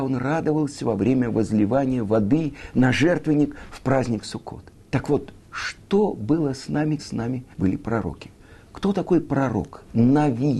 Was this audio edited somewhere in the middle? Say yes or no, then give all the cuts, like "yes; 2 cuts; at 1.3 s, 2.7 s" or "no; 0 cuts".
yes; 4 cuts; at 4.8 s, 5.4 s, 7.0 s, 7.5 s